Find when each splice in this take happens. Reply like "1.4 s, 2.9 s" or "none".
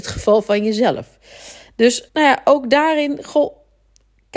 2.1 s